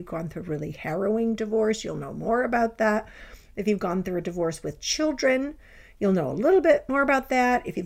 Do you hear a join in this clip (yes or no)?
no